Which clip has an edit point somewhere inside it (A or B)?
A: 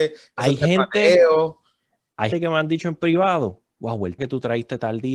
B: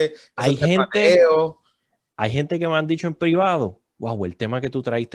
A